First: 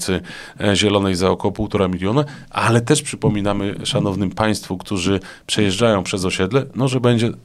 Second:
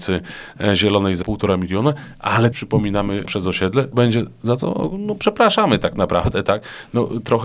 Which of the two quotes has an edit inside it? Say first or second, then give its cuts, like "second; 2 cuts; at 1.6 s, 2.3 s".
second; 4 cuts; at 1.2 s, 2.5 s, 3.3 s, 3.9 s